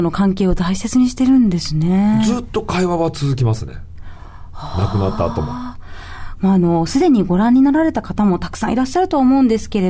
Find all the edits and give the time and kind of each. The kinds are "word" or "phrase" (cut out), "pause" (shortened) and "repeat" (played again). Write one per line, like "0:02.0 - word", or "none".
none